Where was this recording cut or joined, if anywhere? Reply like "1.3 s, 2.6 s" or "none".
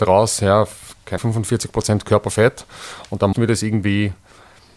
1.2 s, 3.3 s